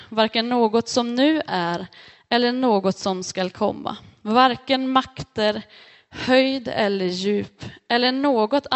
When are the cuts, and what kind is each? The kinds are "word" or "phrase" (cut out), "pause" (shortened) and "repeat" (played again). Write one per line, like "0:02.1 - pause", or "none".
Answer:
none

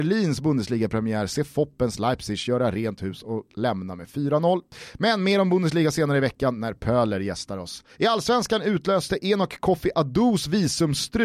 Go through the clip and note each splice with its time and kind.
0:07.9 - pause

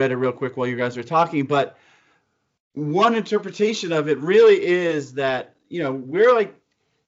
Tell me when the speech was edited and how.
none

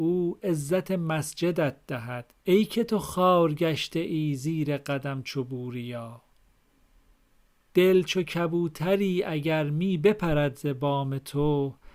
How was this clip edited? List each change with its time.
0:02.4 - pause

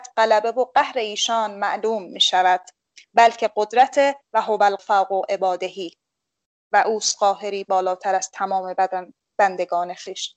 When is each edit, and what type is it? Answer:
0:04.8 - word

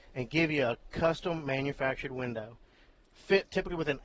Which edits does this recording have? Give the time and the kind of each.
none

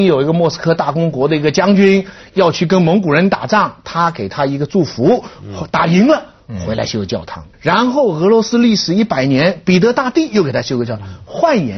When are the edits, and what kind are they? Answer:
0:07.5 - pause

